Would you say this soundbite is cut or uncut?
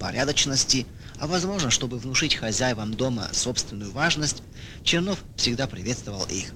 uncut